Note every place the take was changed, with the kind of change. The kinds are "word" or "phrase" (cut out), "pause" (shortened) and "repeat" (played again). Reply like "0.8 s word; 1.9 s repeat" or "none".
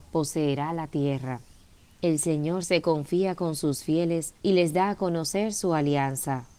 1.8 s pause; 4.4 s pause

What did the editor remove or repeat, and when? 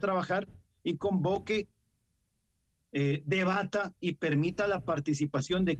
none

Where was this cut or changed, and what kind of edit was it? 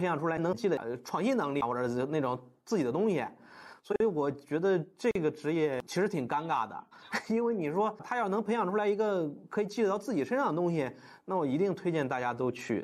5.9 s pause

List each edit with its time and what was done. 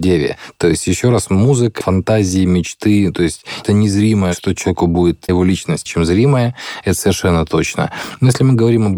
1.8 s word; 3.6 s word; 5.3 s word; 5.9 s word

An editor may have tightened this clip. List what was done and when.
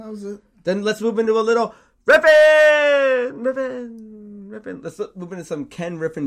none

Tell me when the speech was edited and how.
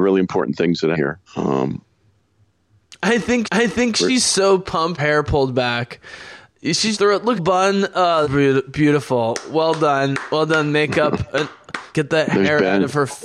0.9 s word; 1.3 s pause; 3.4 s repeat; 5.0 s phrase; 6.9 s word; 7.4 s phrase; 8.2 s word; 11.9 s word

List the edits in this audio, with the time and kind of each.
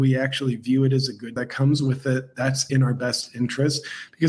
1.4 s phrase; 2.7 s word

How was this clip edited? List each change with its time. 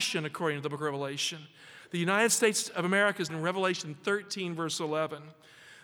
3.3 s word

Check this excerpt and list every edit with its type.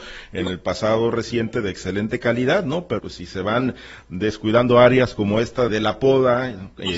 3.0 s word; 5.7 s word

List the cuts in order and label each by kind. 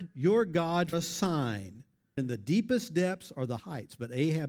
0.9 s word; 2.2 s word; 3.6 s word

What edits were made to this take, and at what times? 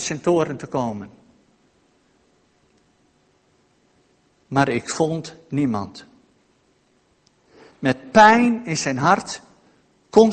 none

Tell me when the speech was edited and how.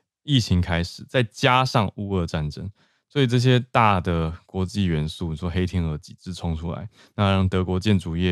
7.0 s pause

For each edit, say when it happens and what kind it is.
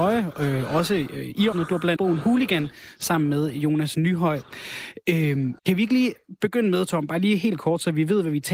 1.5 s phrase; 2.0 s phrase; 5.6 s pause

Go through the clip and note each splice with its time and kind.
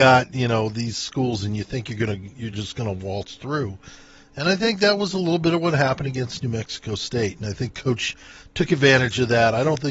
none

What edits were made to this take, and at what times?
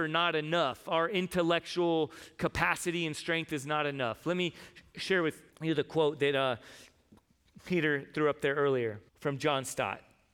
5.5 s pause; 9.1 s pause

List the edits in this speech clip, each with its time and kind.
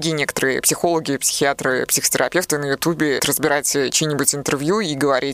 3.2 s word

